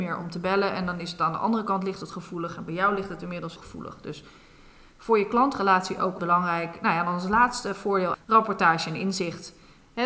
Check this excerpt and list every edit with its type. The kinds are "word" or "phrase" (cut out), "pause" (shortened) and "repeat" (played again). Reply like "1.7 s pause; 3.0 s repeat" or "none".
3.6 s word; 6.2 s word; 8.1 s word